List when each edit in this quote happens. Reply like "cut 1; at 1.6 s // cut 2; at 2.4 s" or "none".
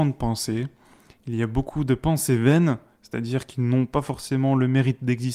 none